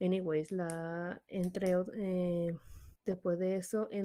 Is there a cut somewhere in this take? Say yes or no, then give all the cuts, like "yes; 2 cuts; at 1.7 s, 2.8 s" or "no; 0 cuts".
yes; 1 cut; at 3.0 s